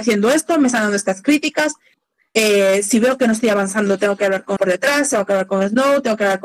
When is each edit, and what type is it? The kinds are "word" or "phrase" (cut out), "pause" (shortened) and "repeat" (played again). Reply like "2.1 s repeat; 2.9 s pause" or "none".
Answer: 4.6 s word